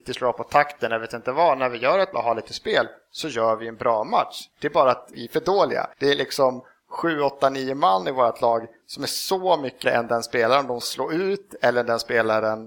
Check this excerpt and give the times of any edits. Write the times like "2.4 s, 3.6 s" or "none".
2.1 s, 5.1 s, 5.9 s, 9.8 s, 10.8 s

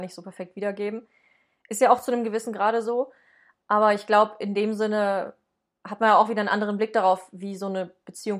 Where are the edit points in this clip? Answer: none

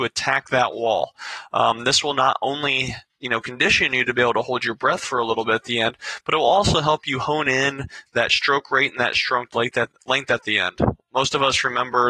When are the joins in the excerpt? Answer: none

